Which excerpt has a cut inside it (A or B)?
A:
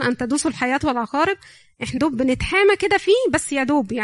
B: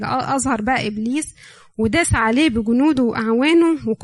A